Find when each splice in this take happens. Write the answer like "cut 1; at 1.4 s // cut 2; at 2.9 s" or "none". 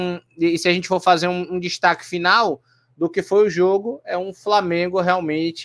none